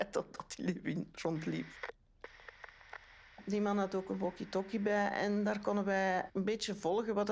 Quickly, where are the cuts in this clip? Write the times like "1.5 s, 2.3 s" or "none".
6.3 s